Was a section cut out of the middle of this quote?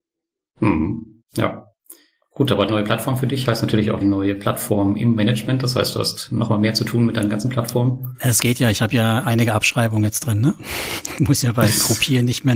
yes; 2 cuts; at 2.7 s, 4.0 s

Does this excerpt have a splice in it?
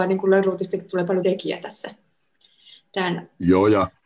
yes; 1 cut; at 1.2 s

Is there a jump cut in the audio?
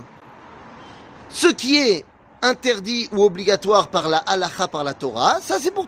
no; 0 cuts

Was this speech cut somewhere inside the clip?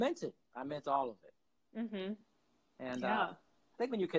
no; 0 cuts

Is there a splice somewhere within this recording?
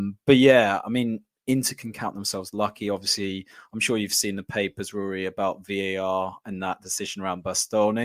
no; 0 cuts

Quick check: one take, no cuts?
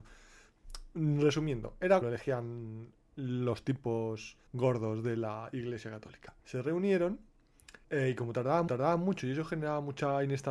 no; 5 cuts; at 2.0 s, 4.5 s, 6.4 s, 7.8 s, 8.7 s

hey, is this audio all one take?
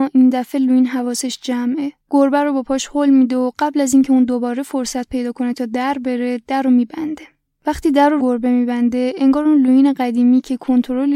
no; 3 cuts; at 2.0 s, 7.4 s, 8.2 s

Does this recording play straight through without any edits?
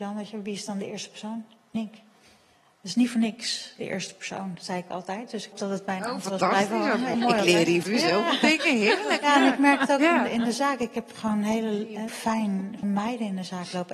no; 6 cuts; at 1.7 s, 5.5 s, 7.1 s, 7.8 s, 12.1 s, 12.8 s

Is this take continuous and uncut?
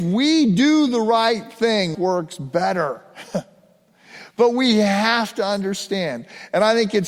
no; 1 cut; at 1.9 s

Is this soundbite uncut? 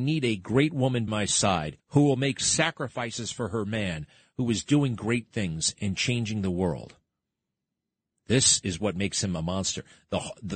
no; 2 cuts; at 1.1 s, 1.8 s

